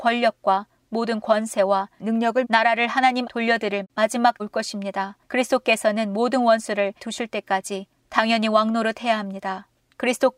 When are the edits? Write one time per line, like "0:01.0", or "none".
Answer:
0:02.4
0:03.2
0:04.4
0:05.2
0:07.0

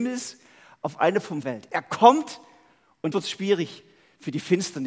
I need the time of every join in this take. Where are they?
0:01.4
0:03.1

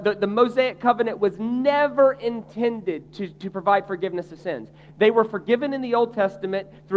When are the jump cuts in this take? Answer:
none

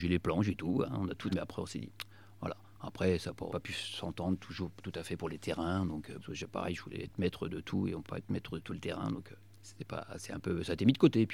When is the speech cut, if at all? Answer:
0:01.3
0:03.5
0:06.2
0:08.0

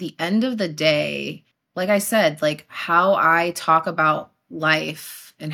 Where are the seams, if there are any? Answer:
0:01.5

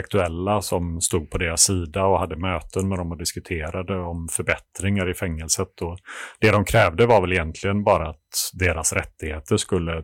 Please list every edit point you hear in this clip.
none

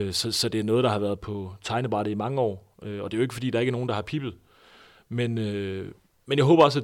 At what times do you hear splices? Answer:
none

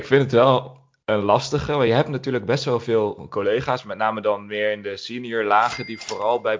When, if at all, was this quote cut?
none

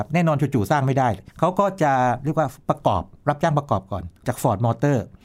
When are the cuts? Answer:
0:01.3
0:02.6
0:04.2

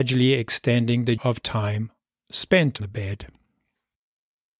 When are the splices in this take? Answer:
0:01.2
0:02.8

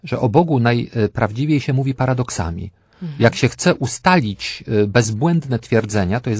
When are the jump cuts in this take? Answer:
none

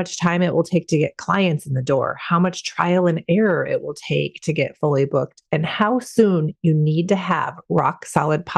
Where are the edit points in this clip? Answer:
none

